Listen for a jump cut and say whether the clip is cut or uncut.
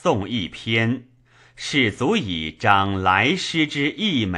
uncut